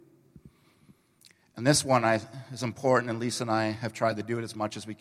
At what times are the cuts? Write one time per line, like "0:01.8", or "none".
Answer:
none